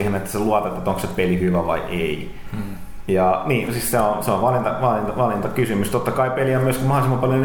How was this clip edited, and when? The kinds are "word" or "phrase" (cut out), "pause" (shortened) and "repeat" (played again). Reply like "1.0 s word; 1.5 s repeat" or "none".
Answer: none

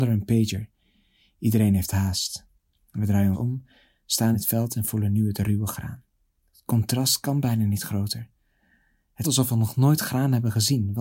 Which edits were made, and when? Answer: 3.3 s word; 4.3 s word; 9.2 s word

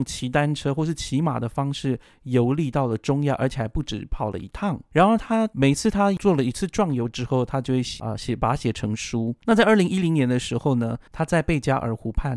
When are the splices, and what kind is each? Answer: 9.4 s pause; 11.1 s pause

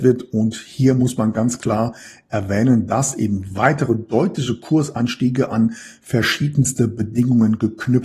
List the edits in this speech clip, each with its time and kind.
none

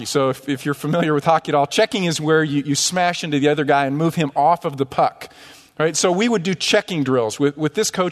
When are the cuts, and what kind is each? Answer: none

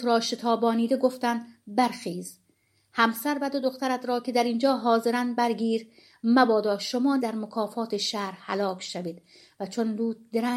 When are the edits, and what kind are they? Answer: 7.2 s word

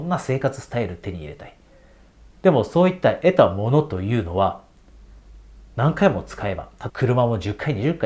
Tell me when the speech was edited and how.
6.9 s phrase

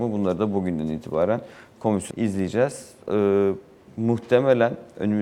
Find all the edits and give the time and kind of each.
2.1 s word

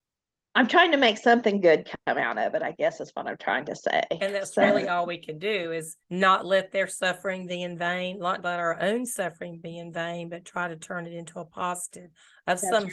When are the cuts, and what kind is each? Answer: 6.0 s pause

